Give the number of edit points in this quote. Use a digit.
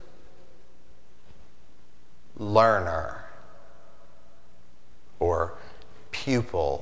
0